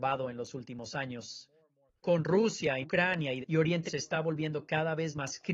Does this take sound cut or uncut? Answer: cut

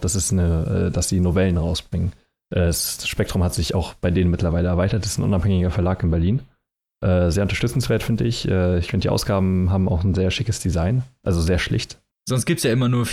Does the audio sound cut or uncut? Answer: uncut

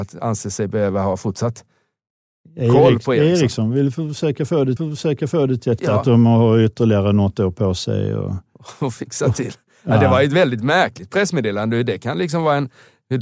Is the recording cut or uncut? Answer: cut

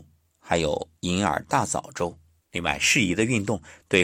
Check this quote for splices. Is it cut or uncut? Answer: cut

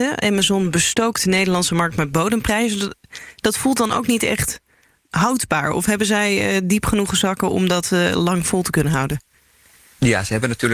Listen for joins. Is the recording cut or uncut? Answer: uncut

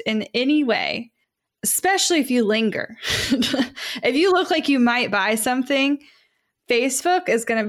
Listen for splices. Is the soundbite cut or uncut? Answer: cut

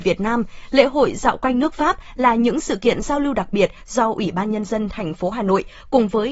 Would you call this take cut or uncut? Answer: uncut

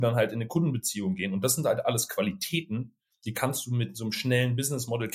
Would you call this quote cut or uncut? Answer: uncut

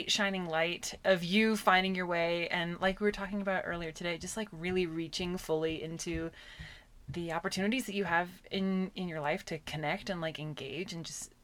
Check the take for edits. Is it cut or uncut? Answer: uncut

